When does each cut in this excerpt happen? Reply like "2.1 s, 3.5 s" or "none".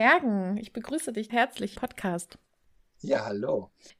1.3 s, 1.8 s